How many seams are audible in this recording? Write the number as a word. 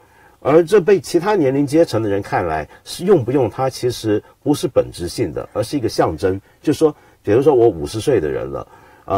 zero